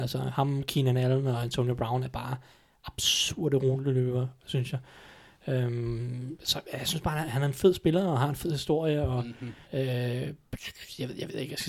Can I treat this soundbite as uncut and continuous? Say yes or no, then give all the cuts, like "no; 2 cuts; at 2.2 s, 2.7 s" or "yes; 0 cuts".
no; 1 cut; at 9.6 s